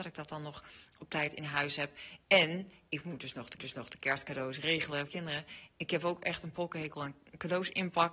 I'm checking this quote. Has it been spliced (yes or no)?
yes